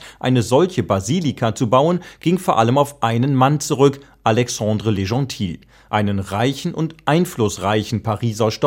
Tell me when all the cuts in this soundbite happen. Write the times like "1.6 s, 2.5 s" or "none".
none